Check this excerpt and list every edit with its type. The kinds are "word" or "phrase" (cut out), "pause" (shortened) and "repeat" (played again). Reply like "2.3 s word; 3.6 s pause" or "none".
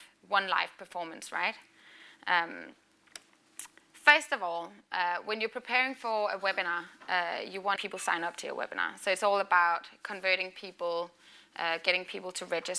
7.8 s phrase